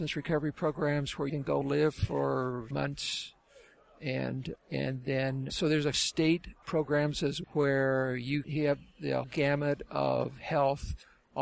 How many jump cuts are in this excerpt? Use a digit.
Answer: 9